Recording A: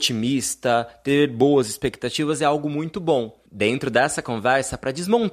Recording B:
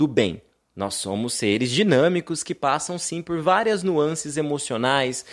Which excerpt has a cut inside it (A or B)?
A